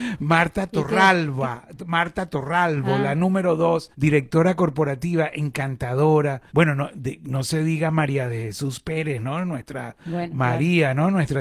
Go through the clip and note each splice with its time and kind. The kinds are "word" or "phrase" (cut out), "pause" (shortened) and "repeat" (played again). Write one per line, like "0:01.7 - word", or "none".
0:03.9 - pause
0:06.5 - pause

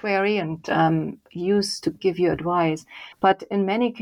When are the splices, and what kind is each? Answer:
0:03.1 - pause

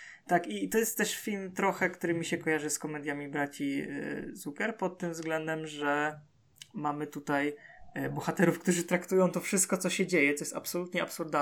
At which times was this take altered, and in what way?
none

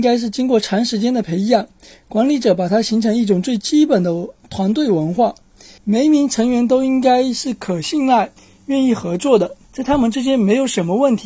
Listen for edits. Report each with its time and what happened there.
0:05.8 - pause
0:08.4 - pause
0:09.6 - pause

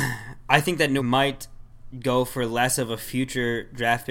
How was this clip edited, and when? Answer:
0:01.0 - word

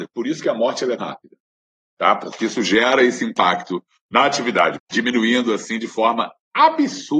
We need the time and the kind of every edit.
0:01.0 - word
0:04.8 - word

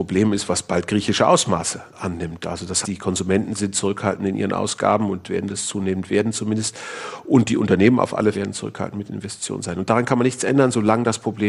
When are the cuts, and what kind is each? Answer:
0:02.8 - word
0:08.3 - word

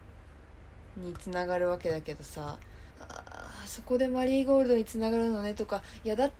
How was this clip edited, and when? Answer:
0:02.9 - pause

